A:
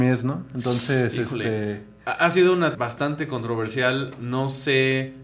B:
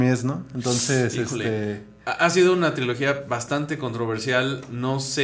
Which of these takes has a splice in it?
A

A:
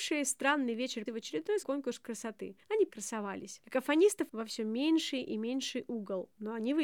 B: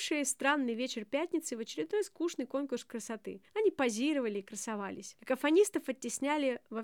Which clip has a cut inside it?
A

